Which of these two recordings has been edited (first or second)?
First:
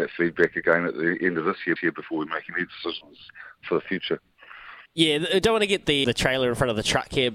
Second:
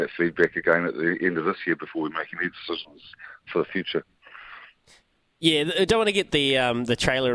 first